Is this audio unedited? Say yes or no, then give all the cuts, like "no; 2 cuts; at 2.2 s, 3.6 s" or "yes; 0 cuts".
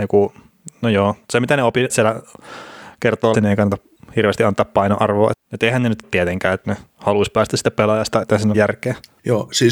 no; 7 cuts; at 1.9 s, 3.3 s, 5.3 s, 6.0 s, 6.6 s, 8.2 s, 8.5 s